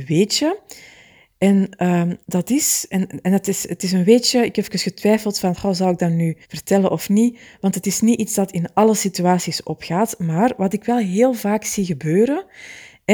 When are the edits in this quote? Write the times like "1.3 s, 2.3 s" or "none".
2.2 s, 6.4 s